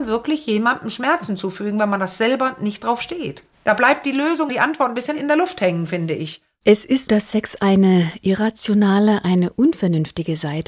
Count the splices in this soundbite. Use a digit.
2